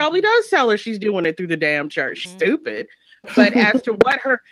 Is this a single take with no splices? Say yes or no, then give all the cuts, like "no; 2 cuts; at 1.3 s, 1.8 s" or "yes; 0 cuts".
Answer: no; 1 cut; at 2.3 s